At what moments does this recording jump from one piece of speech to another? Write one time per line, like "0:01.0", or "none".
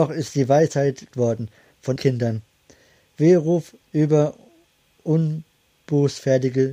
0:01.1
0:02.0
0:03.8